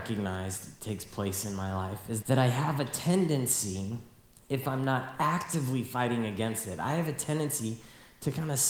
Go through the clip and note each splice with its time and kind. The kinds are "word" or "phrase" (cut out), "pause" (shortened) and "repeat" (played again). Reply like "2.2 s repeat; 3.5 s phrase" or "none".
2.2 s word; 4.3 s pause